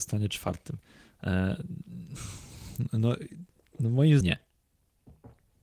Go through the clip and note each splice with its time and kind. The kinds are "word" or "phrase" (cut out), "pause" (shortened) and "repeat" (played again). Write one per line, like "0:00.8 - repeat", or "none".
0:04.2 - word